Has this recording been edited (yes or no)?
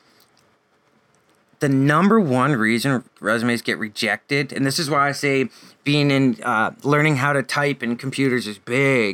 no